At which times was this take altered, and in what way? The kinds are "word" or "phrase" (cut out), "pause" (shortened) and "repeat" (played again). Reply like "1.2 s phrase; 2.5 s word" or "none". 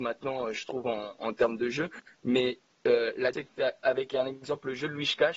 3.3 s word

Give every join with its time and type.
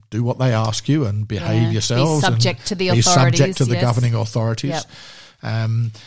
none

